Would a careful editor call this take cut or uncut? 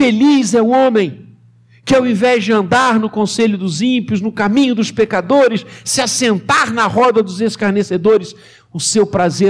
uncut